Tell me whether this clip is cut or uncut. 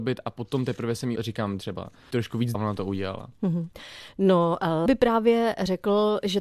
cut